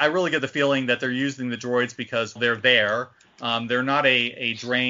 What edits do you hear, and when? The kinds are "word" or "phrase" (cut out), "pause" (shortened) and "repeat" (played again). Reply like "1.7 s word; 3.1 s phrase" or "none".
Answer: 2.4 s word